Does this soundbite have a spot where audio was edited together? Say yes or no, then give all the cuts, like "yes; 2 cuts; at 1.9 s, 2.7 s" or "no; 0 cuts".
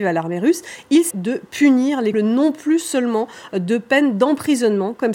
yes; 2 cuts; at 1.1 s, 2.1 s